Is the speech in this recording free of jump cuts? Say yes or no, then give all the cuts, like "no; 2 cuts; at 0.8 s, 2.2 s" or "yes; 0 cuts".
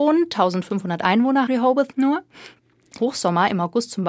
no; 2 cuts; at 1.5 s, 3.0 s